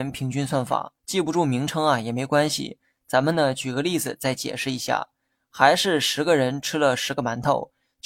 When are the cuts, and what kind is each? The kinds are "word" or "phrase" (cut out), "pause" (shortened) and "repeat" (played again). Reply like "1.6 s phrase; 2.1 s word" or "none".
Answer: 1.0 s pause